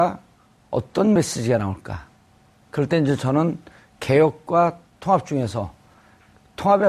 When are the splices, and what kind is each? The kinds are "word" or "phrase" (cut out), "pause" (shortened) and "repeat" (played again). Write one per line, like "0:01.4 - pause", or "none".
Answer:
none